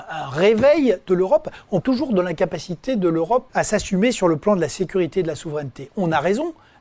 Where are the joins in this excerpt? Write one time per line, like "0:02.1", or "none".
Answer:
0:01.8
0:03.5